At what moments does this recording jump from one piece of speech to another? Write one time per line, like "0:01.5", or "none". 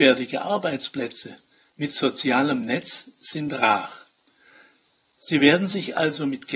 none